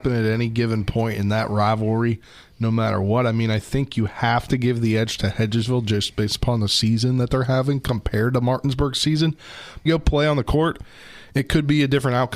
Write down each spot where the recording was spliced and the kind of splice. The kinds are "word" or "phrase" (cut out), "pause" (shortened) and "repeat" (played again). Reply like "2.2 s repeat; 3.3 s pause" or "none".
9.9 s phrase